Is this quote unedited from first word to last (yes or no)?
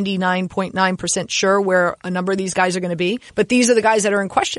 no